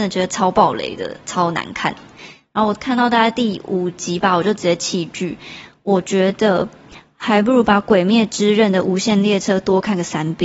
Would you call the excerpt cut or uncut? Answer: uncut